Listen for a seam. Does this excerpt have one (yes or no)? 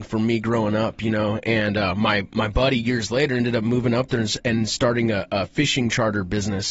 no